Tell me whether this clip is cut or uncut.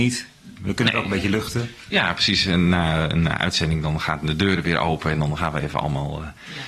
uncut